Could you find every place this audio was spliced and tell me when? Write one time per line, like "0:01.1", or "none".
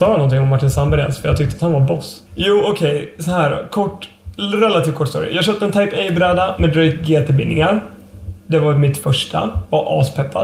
0:02.3

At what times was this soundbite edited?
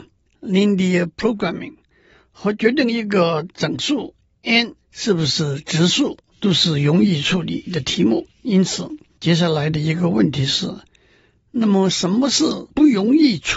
0:04.8
0:06.3
0:08.3
0:09.1

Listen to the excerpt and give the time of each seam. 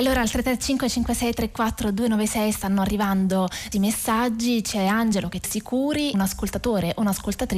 0:03.7
0:05.4
0:06.1

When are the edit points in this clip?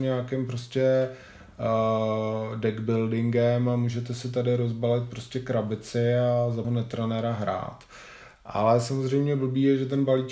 0:06.6

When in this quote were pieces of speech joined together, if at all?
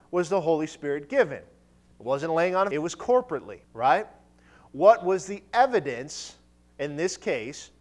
0:02.7
0:03.6

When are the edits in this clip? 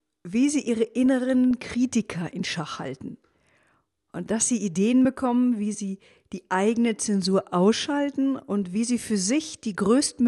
none

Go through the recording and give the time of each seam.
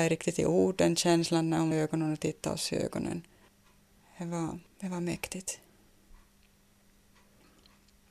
0:01.7
0:03.5
0:04.7

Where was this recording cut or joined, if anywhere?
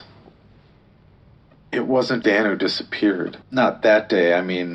0:02.2
0:03.4

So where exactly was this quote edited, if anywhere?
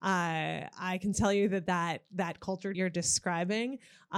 0:01.1
0:02.7

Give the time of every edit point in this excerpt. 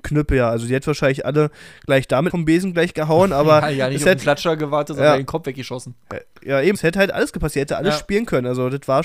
0:02.3
0:06.7

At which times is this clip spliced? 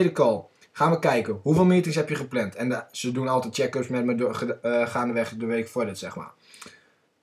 none

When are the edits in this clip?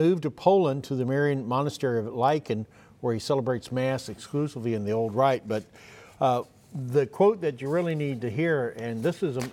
none

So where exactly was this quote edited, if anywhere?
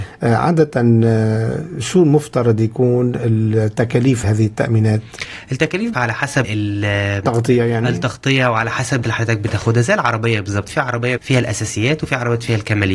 0:04.2
0:05.9
0:06.4
0:09.0
0:11.2

